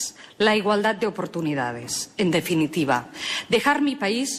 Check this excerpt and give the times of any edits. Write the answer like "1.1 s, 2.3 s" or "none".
none